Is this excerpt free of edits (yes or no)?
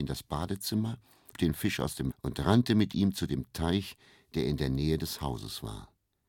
no